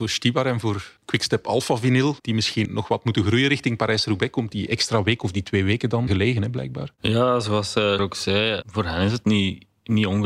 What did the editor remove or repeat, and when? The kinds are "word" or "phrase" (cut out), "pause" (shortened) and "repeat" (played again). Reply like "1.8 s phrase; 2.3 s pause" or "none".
1.0 s pause; 2.2 s pause; 2.6 s word; 6.1 s phrase; 8.0 s word; 8.6 s word